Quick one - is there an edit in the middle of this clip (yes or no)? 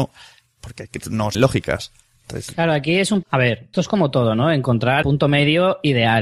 yes